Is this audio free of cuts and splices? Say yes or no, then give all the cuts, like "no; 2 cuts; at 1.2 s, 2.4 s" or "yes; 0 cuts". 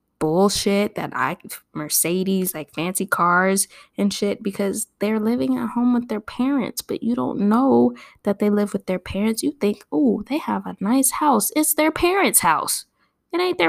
yes; 0 cuts